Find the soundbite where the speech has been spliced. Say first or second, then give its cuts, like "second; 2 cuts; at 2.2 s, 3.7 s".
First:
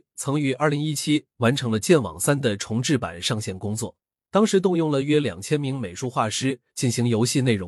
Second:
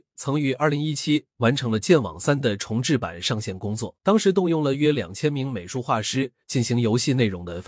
second; 1 cut; at 4.0 s